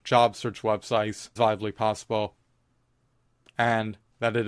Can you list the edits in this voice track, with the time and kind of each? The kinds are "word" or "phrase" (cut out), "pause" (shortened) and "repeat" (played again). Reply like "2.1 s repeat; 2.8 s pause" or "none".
1.4 s word